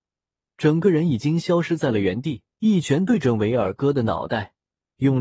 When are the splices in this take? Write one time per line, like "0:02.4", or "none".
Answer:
0:02.5